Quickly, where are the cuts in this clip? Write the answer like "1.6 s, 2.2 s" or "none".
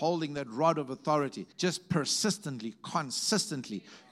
1.5 s